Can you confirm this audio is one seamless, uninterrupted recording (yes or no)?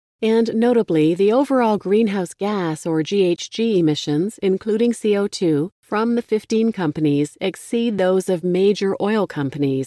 yes